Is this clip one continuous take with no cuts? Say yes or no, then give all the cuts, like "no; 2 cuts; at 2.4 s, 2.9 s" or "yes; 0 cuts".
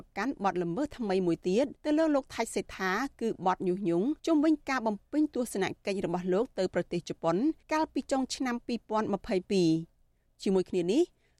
no; 3 cuts; at 1.8 s, 4.2 s, 7.6 s